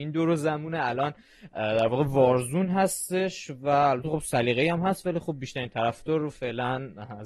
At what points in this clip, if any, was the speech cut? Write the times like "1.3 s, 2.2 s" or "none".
none